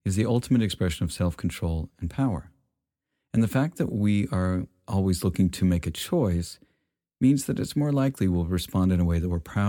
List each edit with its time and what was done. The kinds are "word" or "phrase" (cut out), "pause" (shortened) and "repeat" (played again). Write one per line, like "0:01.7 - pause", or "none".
none

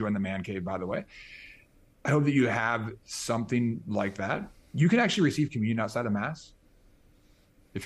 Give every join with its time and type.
none

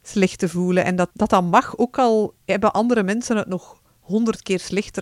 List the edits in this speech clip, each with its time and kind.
0:01.1 - word

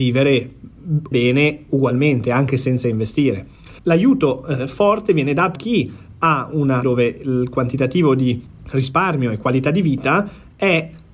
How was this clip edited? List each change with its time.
0:01.1 - word
0:03.8 - pause
0:05.6 - word
0:06.8 - word

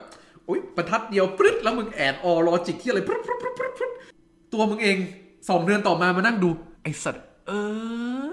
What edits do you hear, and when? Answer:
0:06.7 - pause

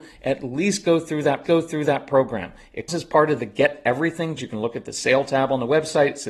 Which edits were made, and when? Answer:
0:01.4 - repeat
0:02.9 - word
0:04.4 - word

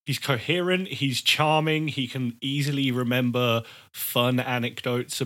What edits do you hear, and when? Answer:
none

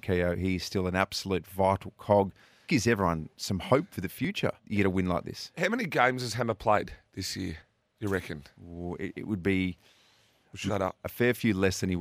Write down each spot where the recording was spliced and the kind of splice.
0:02.7 - phrase
0:04.6 - pause
0:10.7 - word

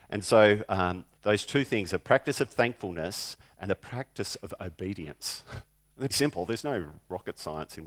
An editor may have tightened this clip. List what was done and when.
0:01.1 - pause
0:03.7 - word
0:06.1 - word

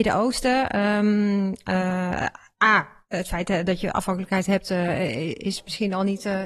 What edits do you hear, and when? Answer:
none

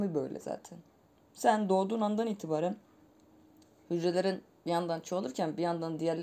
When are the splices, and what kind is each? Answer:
none

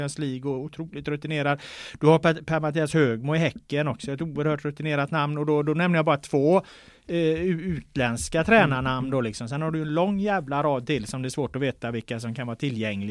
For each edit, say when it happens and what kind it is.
none

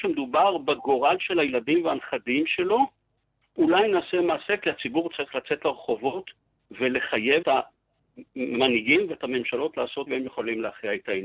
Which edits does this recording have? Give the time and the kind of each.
0:07.4 - word
0:10.1 - word

